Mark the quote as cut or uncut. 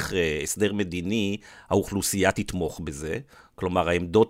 uncut